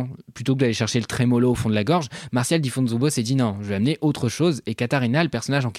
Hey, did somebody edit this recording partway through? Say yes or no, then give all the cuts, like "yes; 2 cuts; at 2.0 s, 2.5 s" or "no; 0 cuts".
no; 0 cuts